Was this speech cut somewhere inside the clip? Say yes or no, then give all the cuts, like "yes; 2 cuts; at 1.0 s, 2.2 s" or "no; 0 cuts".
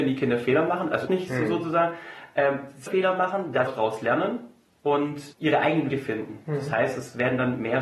yes; 5 cuts; at 1.1 s, 2.9 s, 3.7 s, 5.3 s, 5.9 s